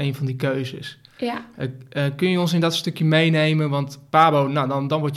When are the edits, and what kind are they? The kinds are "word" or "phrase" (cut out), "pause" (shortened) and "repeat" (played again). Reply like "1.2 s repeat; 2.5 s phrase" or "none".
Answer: none